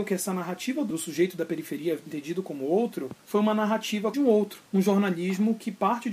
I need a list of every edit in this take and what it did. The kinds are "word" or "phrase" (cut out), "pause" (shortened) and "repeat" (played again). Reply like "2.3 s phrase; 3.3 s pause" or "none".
0.9 s phrase; 3.2 s pause; 4.1 s phrase; 4.7 s pause